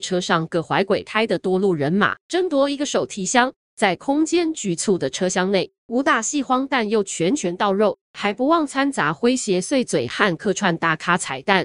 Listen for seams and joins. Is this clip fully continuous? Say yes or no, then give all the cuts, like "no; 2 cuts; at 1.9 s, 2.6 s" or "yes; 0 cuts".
no; 4 cuts; at 2.2 s, 3.5 s, 5.8 s, 8.0 s